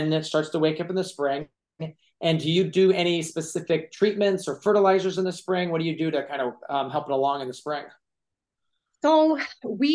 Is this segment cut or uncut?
uncut